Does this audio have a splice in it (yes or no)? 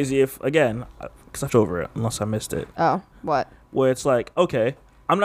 yes